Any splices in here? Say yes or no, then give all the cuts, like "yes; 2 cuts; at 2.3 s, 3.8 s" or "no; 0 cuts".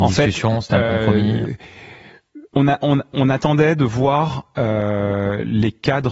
yes; 1 cut; at 2.5 s